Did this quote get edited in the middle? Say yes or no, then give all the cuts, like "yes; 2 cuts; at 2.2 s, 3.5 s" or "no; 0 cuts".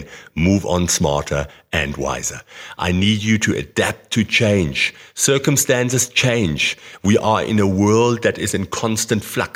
no; 0 cuts